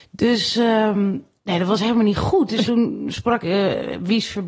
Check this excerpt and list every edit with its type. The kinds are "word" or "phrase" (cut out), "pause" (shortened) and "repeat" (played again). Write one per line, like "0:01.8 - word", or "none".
0:02.6 - word
0:03.4 - word